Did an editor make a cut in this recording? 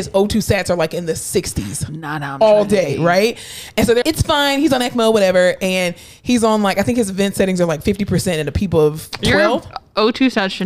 yes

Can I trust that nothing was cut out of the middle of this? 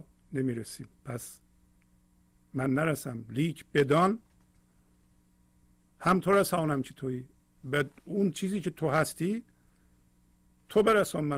no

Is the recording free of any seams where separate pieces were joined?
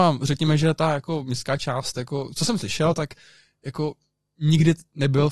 yes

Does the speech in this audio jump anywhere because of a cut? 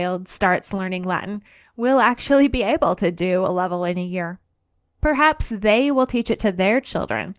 no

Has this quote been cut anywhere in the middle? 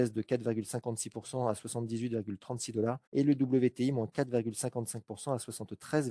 yes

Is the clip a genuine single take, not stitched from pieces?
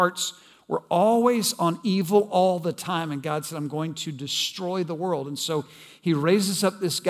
yes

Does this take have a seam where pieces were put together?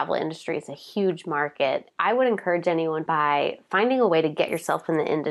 yes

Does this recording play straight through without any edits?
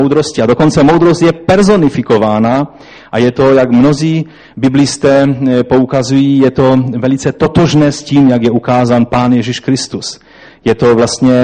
yes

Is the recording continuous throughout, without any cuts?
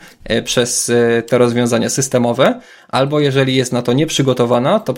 yes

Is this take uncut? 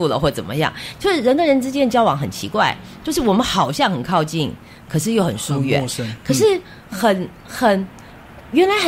no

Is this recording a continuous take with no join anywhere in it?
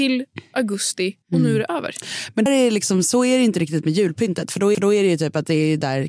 no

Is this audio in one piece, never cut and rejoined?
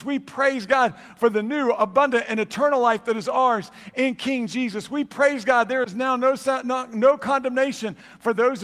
yes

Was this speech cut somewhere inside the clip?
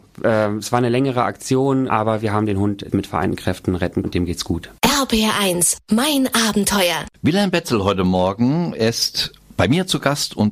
yes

